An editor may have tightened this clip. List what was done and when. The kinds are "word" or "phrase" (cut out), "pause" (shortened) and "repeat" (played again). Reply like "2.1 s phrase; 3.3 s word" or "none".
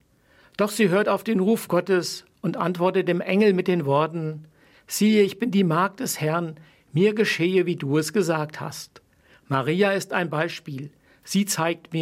none